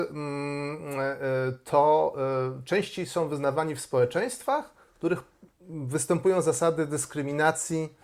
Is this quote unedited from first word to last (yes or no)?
yes